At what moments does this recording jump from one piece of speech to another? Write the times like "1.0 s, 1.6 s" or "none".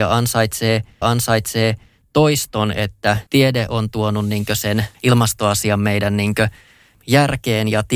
1.0 s, 3.3 s

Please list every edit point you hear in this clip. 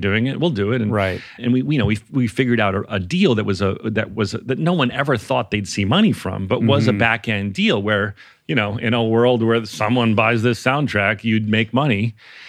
1.4 s

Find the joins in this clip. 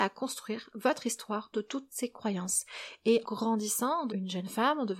1.5 s, 3.2 s, 4.1 s

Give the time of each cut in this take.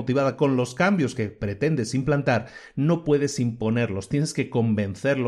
none

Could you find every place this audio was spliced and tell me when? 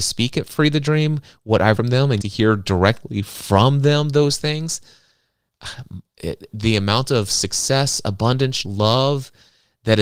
1.8 s, 2.2 s, 6.5 s, 8.6 s

